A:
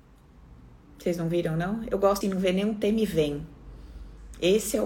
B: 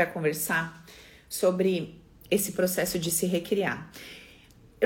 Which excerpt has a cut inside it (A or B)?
A